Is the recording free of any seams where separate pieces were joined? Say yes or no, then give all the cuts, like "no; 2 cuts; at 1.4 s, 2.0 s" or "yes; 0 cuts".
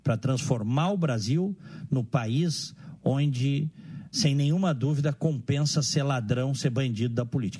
no; 1 cut; at 4.1 s